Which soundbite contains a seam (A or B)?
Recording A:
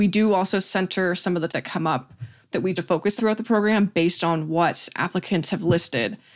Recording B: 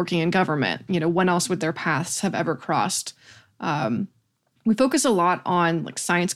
A